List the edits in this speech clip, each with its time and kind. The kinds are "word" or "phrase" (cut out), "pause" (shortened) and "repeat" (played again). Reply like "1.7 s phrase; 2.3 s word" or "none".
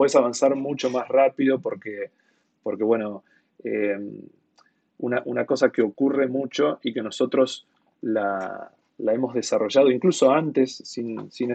none